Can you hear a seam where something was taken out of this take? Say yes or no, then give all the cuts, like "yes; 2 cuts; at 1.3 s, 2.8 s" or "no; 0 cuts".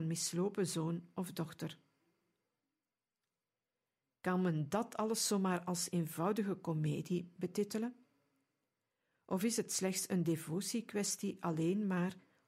no; 0 cuts